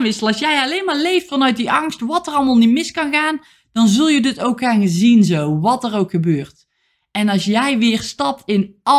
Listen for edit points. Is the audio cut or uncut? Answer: uncut